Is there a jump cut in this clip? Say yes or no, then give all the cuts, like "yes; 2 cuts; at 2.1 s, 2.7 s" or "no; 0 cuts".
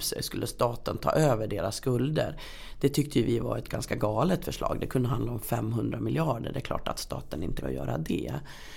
yes; 1 cut; at 7.6 s